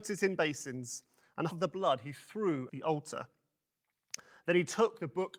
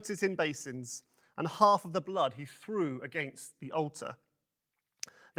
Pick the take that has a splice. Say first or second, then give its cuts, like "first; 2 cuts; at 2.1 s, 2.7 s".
first; 2 cuts; at 1.5 s, 2.7 s